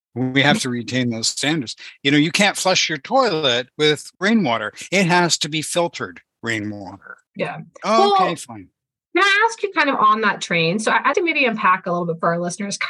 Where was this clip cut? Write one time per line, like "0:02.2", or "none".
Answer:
0:07.3
0:07.8
0:11.1